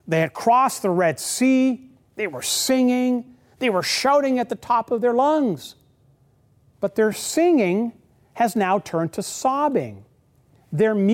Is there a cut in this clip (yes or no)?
no